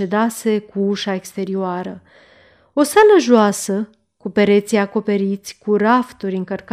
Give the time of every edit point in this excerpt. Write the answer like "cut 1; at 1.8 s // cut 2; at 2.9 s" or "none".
none